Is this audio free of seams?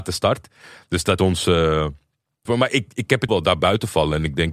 no; 3 cuts; at 1.2 s, 2.5 s, 3.3 s

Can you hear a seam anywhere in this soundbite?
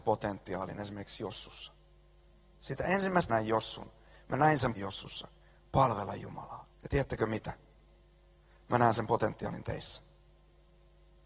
yes; 3 cuts; at 3.3 s, 4.7 s, 6.7 s

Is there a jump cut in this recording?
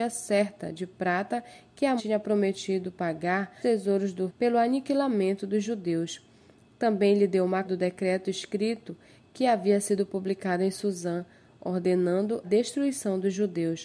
yes; 5 cuts; at 2.0 s, 3.6 s, 4.3 s, 7.6 s, 12.4 s

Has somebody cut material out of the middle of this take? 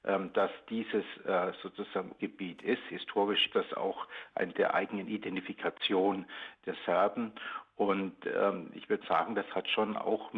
yes; 4 cuts; at 2.2 s, 3.5 s, 4.5 s, 9.0 s

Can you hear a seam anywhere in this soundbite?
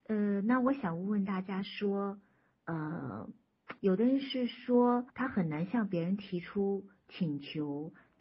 yes; 2 cuts; at 3.8 s, 5.1 s

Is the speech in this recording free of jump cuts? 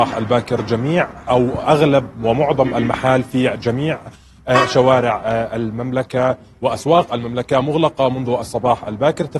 yes; 0 cuts

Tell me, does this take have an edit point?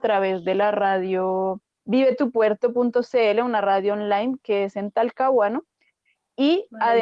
no; 0 cuts

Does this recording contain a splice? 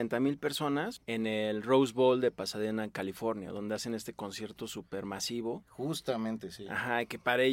no; 0 cuts

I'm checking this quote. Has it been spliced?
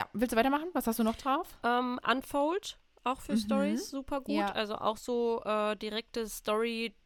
no; 0 cuts

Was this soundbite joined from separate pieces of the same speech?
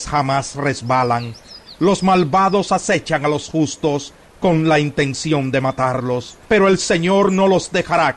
yes; 1 cut; at 6.4 s

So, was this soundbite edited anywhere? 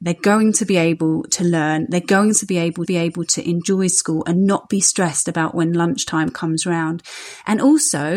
yes; 1 cut; at 2.9 s

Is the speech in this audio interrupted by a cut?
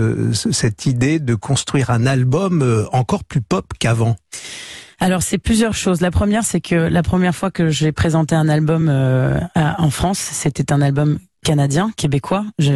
no; 0 cuts

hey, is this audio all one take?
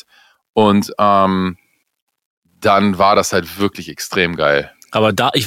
yes; 0 cuts

